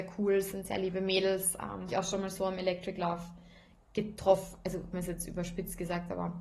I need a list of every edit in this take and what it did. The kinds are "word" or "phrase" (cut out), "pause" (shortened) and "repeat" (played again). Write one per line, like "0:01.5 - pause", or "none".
0:01.9 - word
0:04.9 - word